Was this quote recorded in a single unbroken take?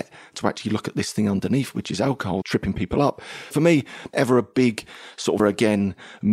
no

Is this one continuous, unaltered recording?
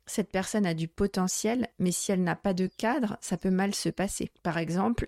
yes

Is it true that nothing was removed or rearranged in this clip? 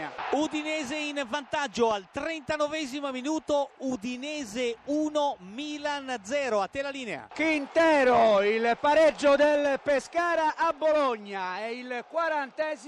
yes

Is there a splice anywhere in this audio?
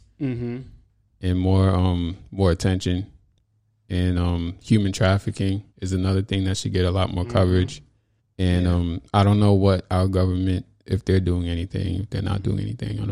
yes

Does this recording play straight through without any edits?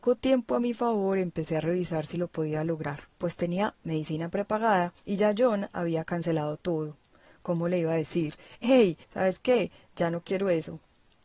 no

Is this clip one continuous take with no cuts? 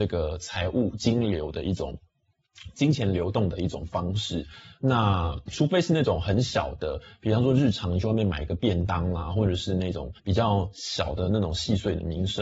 no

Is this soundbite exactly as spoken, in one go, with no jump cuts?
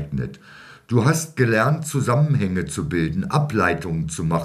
yes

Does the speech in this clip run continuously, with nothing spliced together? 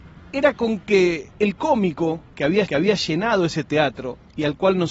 no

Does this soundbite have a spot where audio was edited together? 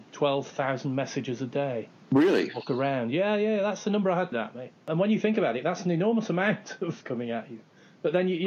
yes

